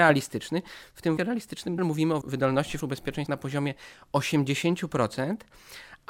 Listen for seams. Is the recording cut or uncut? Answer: cut